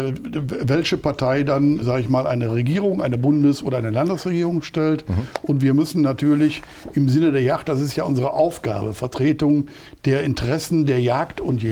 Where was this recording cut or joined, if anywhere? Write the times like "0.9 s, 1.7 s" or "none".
1.8 s